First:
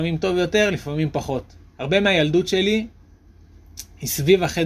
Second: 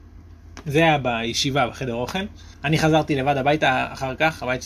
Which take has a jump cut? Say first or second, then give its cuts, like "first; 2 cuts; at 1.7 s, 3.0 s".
second; 1 cut; at 2.5 s